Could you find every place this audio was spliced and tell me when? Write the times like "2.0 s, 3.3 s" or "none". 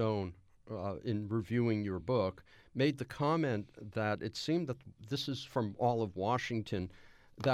none